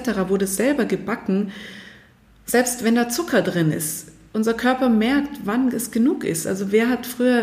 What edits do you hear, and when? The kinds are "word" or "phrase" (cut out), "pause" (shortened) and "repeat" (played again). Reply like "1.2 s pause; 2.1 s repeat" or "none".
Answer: none